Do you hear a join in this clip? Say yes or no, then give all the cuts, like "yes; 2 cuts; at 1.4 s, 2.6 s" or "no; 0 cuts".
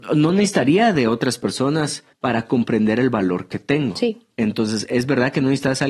yes; 2 cuts; at 2.1 s, 4.3 s